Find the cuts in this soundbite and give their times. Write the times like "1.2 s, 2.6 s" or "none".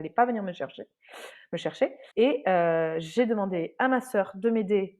2.1 s